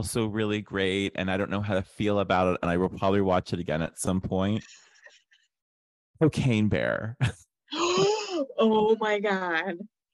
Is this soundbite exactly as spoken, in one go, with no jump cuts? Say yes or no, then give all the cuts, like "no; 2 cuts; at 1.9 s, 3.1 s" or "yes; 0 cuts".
yes; 0 cuts